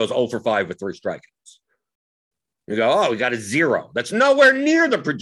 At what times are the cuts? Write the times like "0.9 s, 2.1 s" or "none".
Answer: none